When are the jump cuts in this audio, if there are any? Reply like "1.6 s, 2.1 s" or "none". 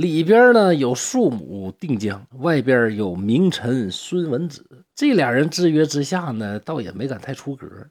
2.3 s, 4.9 s